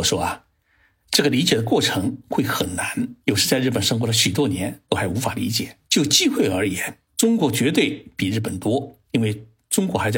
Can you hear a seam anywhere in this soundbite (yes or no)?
yes